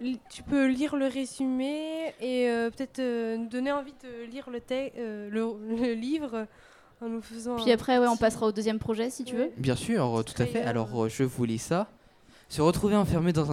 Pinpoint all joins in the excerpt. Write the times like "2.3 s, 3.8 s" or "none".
none